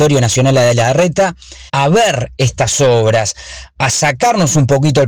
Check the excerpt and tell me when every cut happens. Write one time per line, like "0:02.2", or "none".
0:01.7